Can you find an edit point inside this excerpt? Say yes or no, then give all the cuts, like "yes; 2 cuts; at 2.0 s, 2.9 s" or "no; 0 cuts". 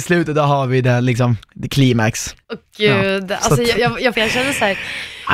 yes; 4 cuts; at 1.4 s, 2.4 s, 3.7 s, 4.1 s